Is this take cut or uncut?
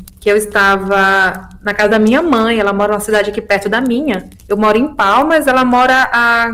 cut